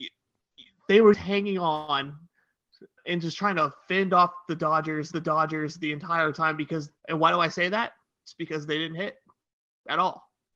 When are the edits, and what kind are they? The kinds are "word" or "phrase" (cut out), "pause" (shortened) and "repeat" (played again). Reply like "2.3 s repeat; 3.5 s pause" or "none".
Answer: 1.1 s word; 3.0 s word; 5.1 s repeat; 7.0 s pause